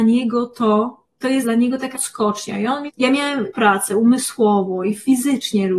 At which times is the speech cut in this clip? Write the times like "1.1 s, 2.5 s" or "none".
1.4 s, 1.9 s, 2.9 s, 3.5 s